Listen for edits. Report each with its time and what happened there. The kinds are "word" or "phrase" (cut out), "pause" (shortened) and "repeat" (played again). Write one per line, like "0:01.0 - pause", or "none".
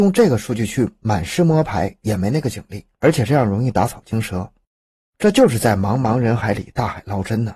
0:02.9 - pause